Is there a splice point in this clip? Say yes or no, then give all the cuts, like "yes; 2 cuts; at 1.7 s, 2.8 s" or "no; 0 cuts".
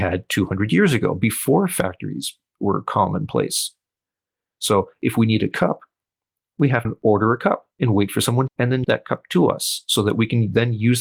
yes; 4 cuts; at 6.8 s, 7.7 s, 8.5 s, 8.8 s